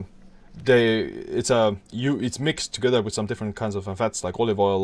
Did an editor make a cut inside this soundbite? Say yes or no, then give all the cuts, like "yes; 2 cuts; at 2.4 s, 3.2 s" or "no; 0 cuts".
yes; 1 cut; at 1.9 s